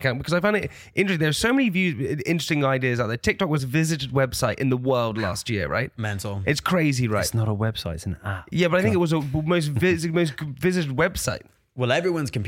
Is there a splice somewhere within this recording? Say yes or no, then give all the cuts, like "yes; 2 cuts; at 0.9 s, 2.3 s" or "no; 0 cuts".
yes; 1 cut; at 3.6 s